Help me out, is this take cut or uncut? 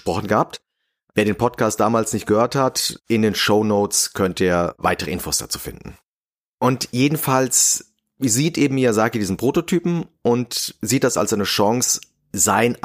uncut